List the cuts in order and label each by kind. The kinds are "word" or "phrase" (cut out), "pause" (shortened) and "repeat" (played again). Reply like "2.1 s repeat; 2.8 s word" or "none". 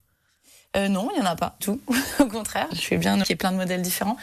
1.6 s word; 2.7 s word; 3.2 s word